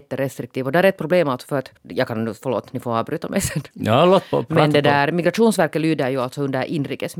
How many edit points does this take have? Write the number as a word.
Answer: one